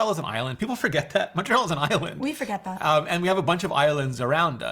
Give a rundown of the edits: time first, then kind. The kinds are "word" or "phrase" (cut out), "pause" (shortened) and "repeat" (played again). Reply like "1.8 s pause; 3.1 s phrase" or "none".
none